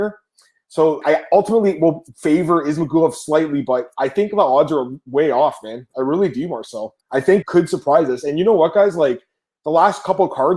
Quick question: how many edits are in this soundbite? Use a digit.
3